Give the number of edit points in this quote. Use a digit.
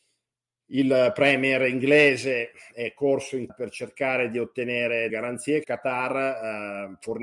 3